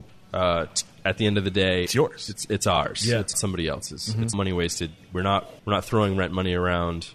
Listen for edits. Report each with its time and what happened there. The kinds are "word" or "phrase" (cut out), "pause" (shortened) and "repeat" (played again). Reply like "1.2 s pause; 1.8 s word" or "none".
1.9 s word; 3.3 s phrase; 4.3 s word; 5.6 s pause